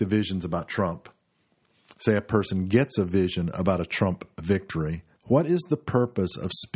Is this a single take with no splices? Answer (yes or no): no